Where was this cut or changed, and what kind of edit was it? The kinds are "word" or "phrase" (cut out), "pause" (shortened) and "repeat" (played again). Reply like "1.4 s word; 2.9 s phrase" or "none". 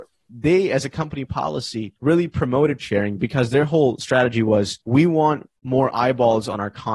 2.0 s pause; 2.8 s word; 4.8 s pause; 5.6 s pause